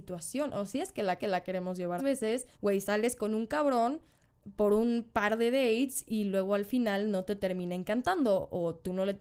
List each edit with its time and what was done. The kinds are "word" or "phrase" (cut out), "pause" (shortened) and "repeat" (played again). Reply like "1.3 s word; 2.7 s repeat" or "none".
1.2 s repeat; 2.0 s phrase; 2.5 s pause